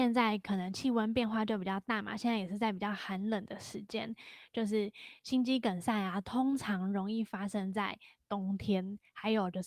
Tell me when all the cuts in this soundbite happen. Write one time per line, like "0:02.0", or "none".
none

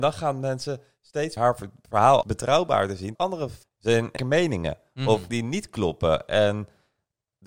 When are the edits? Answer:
0:01.4
0:02.2
0:03.1
0:03.6
0:04.2
0:05.3

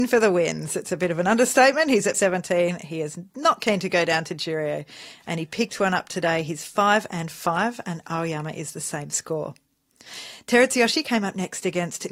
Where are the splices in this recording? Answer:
0:02.1

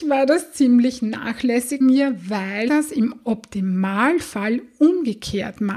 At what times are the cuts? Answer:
0:01.8
0:02.7

